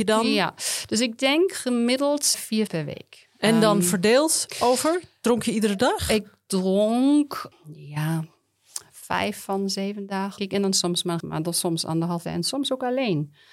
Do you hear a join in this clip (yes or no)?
yes